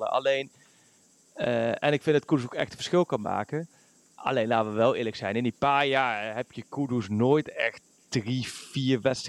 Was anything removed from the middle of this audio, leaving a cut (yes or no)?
no